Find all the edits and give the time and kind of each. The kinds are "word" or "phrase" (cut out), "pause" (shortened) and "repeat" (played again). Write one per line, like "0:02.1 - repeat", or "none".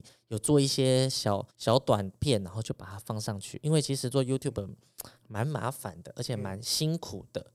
0:01.5 - pause
0:05.2 - pause